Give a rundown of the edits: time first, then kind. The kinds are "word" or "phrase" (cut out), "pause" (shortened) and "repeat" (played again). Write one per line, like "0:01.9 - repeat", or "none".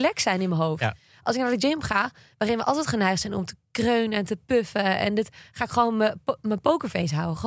none